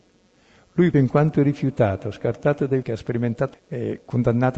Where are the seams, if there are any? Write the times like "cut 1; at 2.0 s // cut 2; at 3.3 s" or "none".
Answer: cut 1; at 0.9 s // cut 2; at 2.8 s // cut 3; at 3.5 s